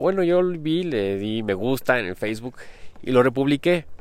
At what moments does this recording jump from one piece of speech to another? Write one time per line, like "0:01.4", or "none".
none